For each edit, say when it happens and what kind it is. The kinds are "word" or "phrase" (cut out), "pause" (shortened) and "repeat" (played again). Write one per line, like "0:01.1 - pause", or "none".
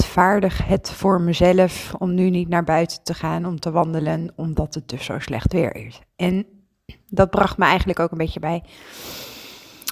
none